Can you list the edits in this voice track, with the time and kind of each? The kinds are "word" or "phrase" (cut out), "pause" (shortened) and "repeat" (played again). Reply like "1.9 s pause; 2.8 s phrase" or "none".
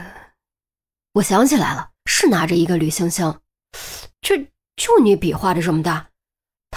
2.0 s pause; 4.1 s pause